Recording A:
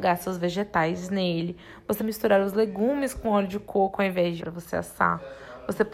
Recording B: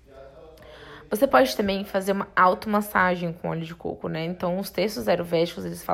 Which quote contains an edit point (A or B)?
A